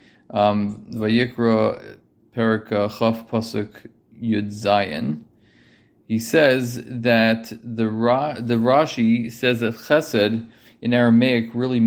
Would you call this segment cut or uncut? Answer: uncut